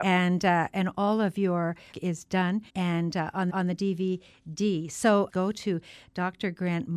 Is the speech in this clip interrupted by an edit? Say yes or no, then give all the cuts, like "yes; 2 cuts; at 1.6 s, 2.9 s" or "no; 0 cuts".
yes; 4 cuts; at 1.9 s, 2.7 s, 3.5 s, 5.3 s